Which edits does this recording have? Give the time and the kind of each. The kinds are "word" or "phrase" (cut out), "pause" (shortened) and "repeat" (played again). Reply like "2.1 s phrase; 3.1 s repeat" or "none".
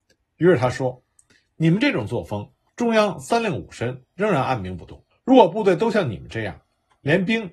2.7 s pause; 5.1 s pause